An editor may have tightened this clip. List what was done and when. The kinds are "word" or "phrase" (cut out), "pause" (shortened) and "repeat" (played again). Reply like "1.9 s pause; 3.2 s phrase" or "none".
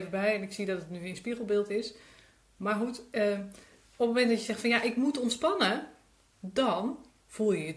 none